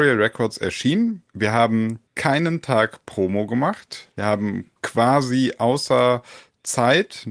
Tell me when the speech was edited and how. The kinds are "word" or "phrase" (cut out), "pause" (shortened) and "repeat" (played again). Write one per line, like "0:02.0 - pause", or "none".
0:01.3 - pause
0:02.1 - pause
0:04.1 - pause
0:04.8 - pause